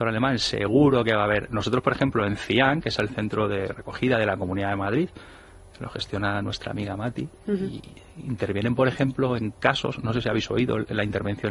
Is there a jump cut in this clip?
no; 0 cuts

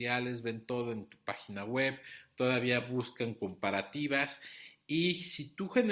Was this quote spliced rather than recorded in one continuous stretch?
no; 0 cuts

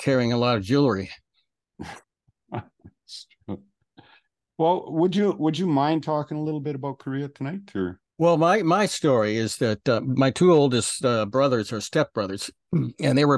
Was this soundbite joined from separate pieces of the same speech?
yes; 2 cuts; at 2.0 s, 8.1 s

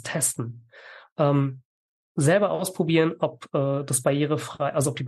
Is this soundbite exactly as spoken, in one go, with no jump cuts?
yes; 0 cuts

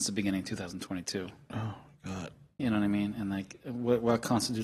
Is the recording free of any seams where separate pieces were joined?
yes; 0 cuts

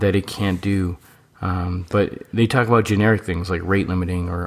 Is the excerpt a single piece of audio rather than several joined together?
yes; 0 cuts

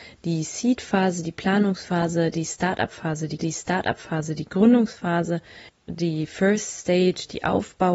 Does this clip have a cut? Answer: yes; 1 cut; at 3.4 s

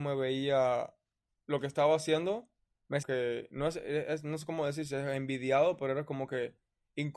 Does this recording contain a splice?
yes; 2 cuts; at 1.3 s, 3.0 s

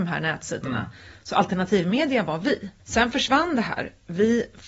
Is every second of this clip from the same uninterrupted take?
no; 1 cut; at 2.8 s

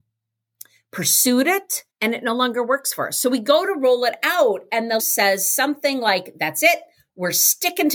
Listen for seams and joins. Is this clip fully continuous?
no; 2 cuts; at 1.9 s, 5.0 s

